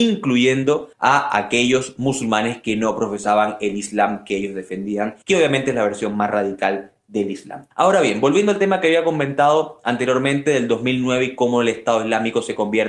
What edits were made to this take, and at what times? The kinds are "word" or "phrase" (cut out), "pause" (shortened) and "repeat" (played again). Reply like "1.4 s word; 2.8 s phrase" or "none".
0.9 s pause; 5.2 s pause; 7.7 s pause